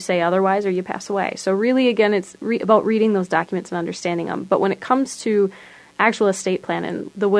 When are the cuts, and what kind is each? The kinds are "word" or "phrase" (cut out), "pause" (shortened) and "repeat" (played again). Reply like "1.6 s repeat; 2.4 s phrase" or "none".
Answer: none

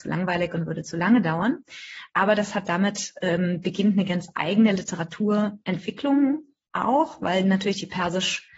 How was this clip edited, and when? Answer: none

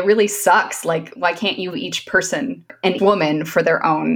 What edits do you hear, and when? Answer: 1.1 s word; 1.7 s word; 3.0 s word

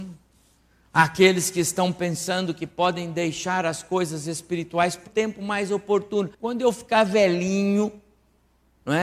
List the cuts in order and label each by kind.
5.1 s word; 6.3 s pause

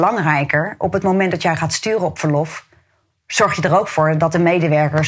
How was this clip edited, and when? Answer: none

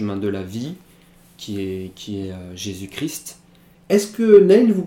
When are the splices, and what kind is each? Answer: none

